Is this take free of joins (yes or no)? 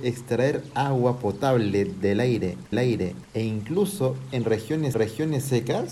no